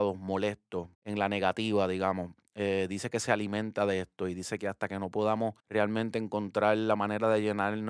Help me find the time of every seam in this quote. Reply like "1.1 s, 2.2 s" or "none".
0.9 s, 5.6 s